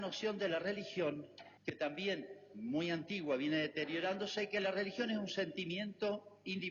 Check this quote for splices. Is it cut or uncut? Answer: cut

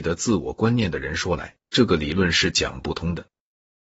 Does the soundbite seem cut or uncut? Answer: cut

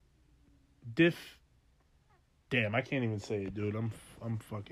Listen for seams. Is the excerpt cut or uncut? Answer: uncut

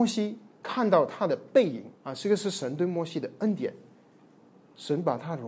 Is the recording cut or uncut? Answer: cut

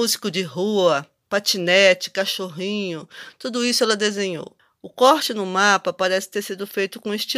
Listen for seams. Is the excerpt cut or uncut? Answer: uncut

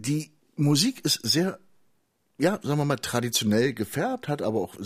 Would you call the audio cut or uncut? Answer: uncut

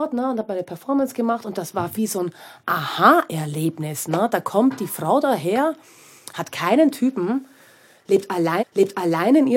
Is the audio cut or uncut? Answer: cut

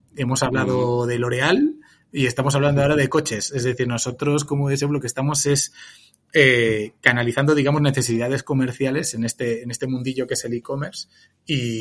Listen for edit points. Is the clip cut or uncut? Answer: uncut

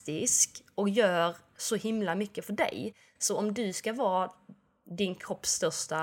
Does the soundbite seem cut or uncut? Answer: uncut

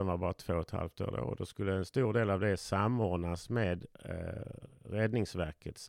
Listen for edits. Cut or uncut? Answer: cut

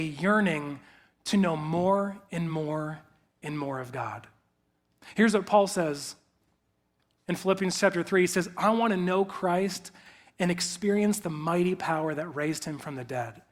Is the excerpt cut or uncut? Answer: uncut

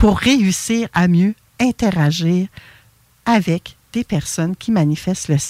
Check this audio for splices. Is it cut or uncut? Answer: uncut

